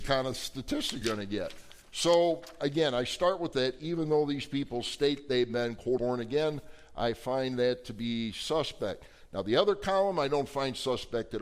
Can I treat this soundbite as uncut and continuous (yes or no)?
no